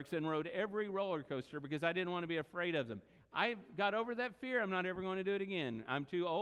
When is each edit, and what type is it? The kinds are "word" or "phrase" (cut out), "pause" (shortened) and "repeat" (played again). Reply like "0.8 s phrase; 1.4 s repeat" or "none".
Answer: none